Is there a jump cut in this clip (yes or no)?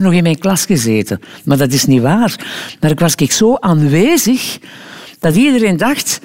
no